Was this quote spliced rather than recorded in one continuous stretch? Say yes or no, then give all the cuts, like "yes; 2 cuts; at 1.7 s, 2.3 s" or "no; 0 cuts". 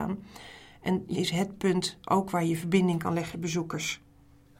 yes; 2 cuts; at 1.1 s, 3.3 s